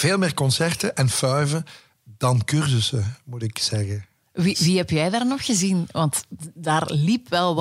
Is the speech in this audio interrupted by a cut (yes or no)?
no